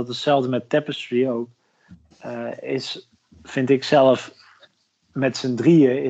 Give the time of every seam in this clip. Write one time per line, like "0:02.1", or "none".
none